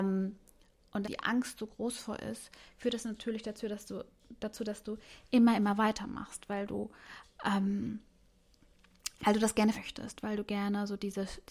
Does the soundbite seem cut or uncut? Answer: cut